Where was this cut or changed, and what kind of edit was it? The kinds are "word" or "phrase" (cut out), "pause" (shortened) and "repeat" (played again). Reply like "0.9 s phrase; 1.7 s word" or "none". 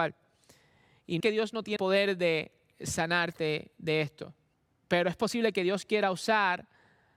1.2 s phrase; 1.8 s word; 4.5 s pause